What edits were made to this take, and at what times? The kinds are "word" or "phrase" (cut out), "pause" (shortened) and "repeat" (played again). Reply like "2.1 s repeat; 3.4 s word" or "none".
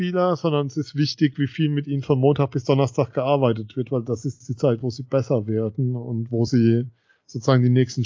none